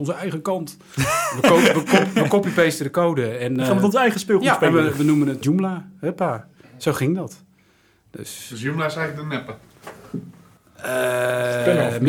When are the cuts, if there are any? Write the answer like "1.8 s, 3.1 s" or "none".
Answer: none